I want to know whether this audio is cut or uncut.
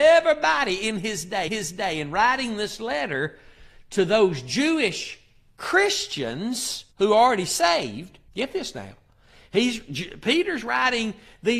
cut